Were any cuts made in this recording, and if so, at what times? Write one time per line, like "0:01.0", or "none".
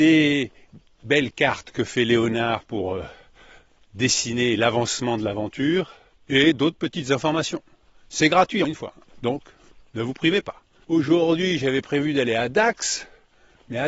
0:08.6

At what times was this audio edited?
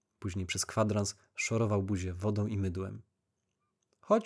none

